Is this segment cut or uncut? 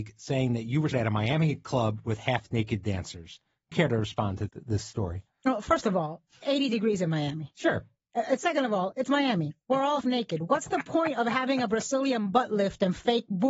cut